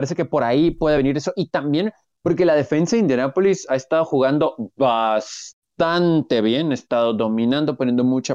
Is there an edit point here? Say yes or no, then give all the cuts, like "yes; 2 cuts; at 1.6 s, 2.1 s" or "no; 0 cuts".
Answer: no; 0 cuts